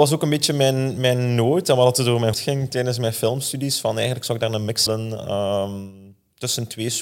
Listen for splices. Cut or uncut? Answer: cut